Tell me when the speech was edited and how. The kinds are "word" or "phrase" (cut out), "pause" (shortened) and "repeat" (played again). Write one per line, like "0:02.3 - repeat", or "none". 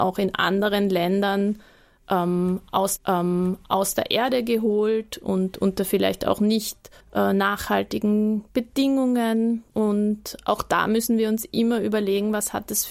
0:03.0 - repeat
0:07.0 - pause
0:09.7 - pause